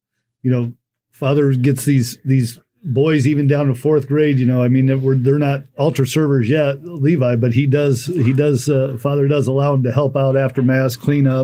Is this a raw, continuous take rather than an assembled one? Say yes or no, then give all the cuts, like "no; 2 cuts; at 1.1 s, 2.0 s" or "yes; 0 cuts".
yes; 0 cuts